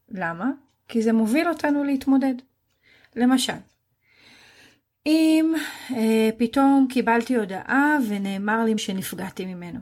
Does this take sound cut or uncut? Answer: cut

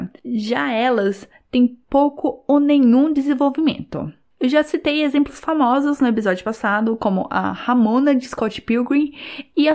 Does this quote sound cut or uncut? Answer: uncut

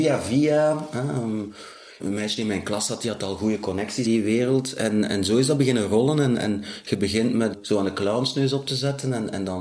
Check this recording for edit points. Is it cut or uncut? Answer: cut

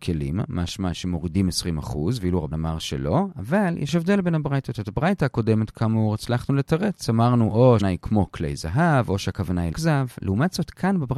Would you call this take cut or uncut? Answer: cut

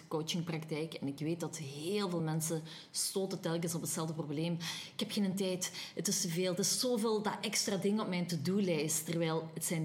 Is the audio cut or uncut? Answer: uncut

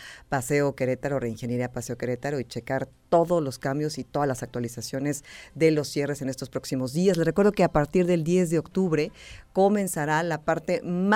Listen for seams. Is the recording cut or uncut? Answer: uncut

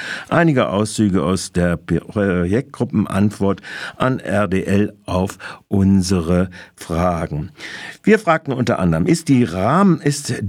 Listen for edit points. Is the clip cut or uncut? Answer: uncut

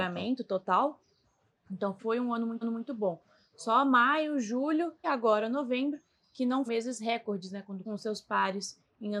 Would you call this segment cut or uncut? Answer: cut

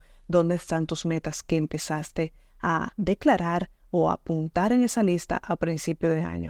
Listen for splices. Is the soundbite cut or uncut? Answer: uncut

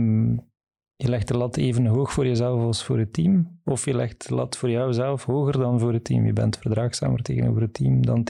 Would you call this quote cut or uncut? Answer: uncut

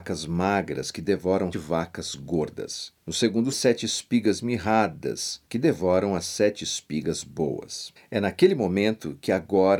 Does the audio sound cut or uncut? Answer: cut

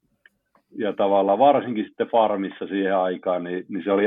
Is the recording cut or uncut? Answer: uncut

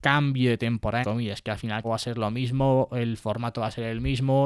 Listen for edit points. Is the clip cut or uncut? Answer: cut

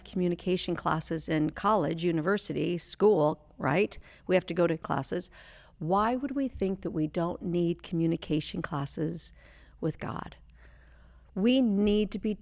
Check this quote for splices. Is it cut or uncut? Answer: cut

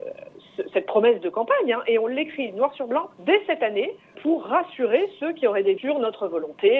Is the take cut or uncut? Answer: cut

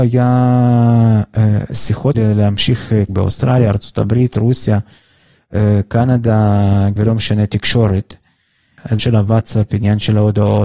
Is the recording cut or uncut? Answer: cut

